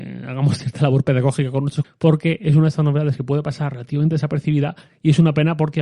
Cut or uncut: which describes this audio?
cut